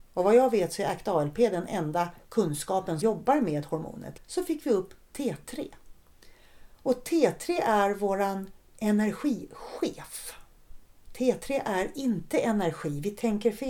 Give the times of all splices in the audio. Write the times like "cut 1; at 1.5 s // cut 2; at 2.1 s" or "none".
cut 1; at 3.0 s // cut 2; at 4.2 s